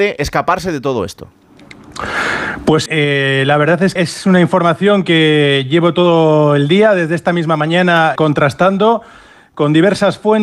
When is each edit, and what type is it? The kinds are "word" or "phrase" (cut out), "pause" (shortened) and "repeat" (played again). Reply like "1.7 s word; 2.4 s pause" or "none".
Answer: 2.9 s word; 4.0 s word; 8.2 s word